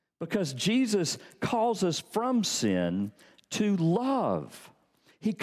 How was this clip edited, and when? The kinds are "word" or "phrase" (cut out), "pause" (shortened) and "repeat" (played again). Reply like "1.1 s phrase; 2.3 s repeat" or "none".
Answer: none